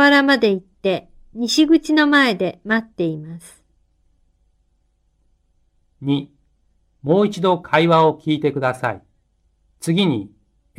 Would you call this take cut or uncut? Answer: uncut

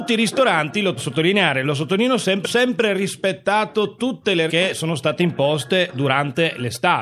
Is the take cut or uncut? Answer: cut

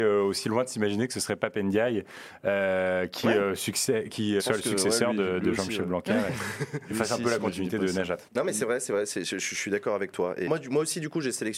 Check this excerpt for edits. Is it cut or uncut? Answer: cut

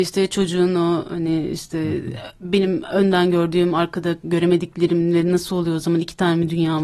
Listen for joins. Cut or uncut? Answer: uncut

